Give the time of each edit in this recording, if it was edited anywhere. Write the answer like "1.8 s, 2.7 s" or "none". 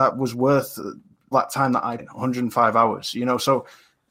1.3 s, 2.0 s